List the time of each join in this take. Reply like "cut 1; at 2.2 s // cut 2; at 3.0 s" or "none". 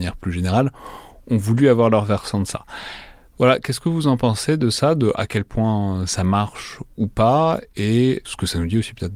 cut 1; at 8.2 s

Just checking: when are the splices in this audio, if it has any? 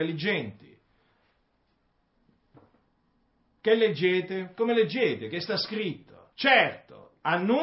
cut 1; at 6.3 s

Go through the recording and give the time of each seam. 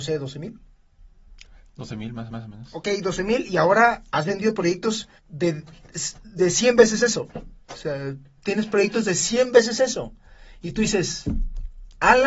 cut 1; at 2.3 s // cut 2; at 5.2 s // cut 3; at 7.6 s

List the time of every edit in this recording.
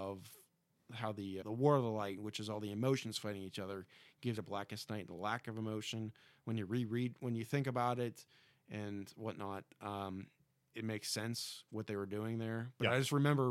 cut 1; at 1.4 s // cut 2; at 4.4 s // cut 3; at 10.7 s

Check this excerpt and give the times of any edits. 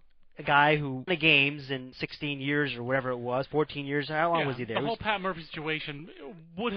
cut 1; at 1.1 s // cut 2; at 1.9 s

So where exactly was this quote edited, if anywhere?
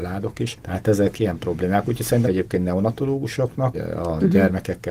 cut 1; at 1.1 s // cut 2; at 2.2 s // cut 3; at 3.7 s

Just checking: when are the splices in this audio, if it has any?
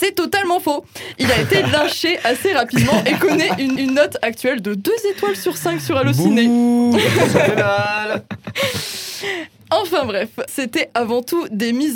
cut 1; at 3.8 s // cut 2; at 10.5 s

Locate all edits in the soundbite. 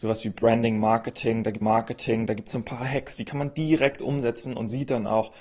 cut 1; at 1.6 s

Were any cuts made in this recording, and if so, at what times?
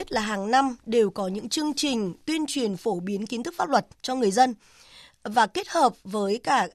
cut 1; at 3.9 s

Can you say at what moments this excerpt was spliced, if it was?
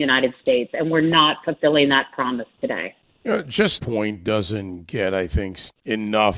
cut 1; at 3.1 s // cut 2; at 3.8 s

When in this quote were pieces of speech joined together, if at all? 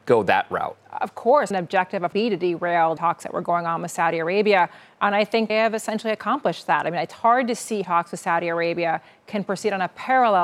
cut 1; at 1.5 s // cut 2; at 2.1 s // cut 3; at 3.0 s // cut 4; at 5.5 s // cut 5; at 7.8 s

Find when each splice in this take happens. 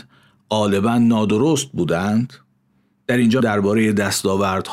cut 1; at 3.4 s

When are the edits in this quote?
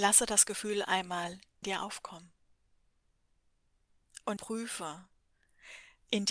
cut 1; at 1.6 s // cut 2; at 4.4 s

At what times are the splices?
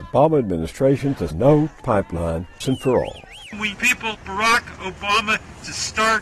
cut 1; at 1.3 s // cut 2; at 1.8 s // cut 3; at 2.6 s // cut 4; at 3.7 s // cut 5; at 4.1 s

